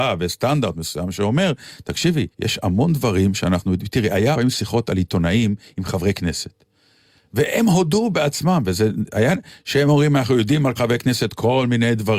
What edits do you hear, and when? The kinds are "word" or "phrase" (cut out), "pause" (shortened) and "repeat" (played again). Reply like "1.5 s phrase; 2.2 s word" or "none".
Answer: 2.3 s pause; 4.3 s word; 10.7 s word